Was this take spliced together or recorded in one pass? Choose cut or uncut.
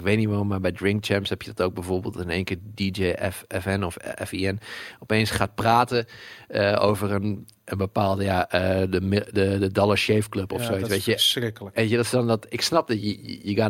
uncut